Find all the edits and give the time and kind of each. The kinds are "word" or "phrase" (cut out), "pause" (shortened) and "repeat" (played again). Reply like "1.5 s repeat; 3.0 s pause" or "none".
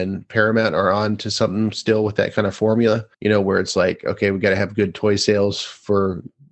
3.1 s pause